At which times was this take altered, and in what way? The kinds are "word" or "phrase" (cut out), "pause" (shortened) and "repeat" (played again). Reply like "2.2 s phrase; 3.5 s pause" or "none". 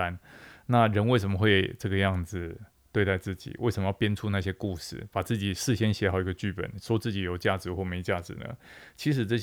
none